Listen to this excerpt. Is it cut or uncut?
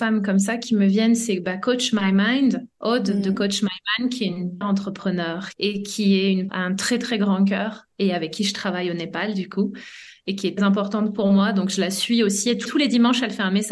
cut